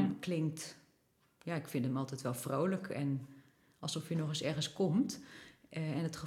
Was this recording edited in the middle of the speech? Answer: no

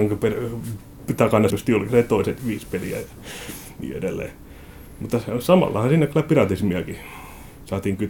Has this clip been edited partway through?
yes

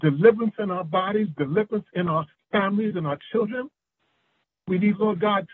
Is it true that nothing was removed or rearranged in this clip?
yes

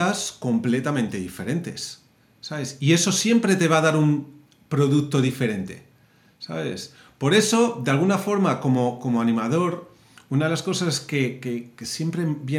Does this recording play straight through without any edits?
yes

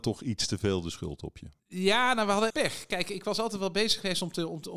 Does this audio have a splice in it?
yes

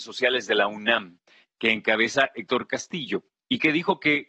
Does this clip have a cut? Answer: no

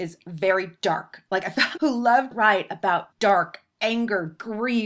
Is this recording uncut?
no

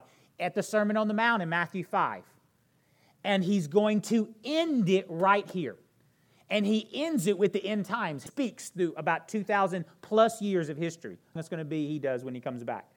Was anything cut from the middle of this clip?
yes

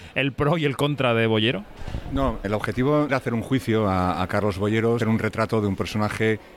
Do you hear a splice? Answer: yes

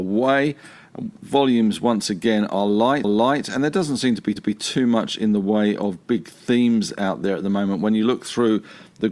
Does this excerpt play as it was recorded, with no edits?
no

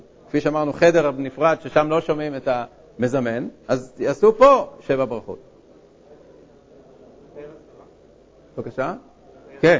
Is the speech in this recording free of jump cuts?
yes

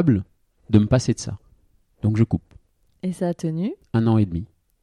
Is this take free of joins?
yes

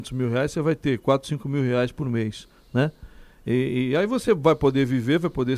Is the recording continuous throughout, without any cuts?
yes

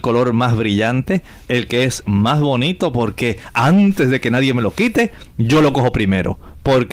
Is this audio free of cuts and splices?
yes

